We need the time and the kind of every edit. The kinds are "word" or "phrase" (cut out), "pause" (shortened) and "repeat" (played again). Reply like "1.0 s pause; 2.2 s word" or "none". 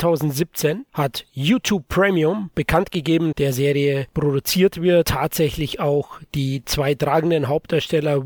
3.3 s phrase; 5.0 s word